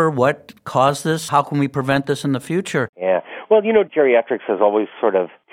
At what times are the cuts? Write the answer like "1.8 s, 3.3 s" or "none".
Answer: none